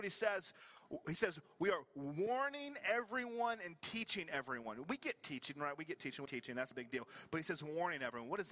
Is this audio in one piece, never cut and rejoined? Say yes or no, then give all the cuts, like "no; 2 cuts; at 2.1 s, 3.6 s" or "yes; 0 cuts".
no; 2 cuts; at 6.3 s, 6.7 s